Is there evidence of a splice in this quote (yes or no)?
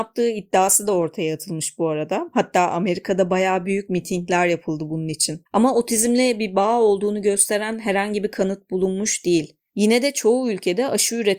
yes